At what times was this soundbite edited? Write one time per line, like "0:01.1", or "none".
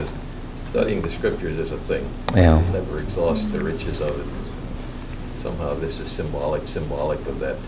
0:01.9
0:06.7